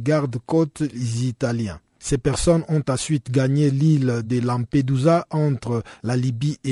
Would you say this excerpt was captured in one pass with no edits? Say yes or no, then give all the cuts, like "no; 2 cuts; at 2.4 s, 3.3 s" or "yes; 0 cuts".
yes; 0 cuts